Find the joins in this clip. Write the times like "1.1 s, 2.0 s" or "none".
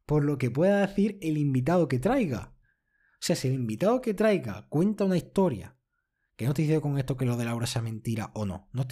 none